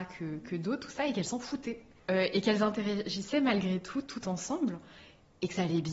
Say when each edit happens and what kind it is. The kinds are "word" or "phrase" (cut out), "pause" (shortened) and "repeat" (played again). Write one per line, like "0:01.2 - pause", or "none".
none